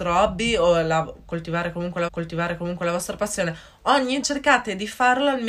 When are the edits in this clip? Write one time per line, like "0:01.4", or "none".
0:02.1
0:04.2